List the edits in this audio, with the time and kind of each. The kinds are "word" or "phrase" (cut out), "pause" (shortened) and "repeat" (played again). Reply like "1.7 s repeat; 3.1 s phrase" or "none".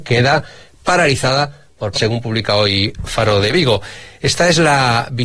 1.9 s phrase